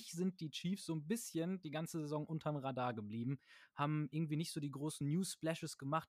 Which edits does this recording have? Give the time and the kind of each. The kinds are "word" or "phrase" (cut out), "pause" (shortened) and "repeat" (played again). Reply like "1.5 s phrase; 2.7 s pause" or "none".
none